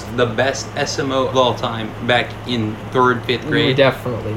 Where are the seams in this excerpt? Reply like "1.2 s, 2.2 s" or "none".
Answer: 1.3 s, 3.2 s